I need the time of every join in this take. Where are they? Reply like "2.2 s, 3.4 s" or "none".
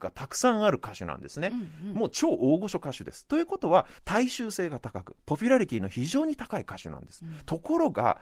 4.0 s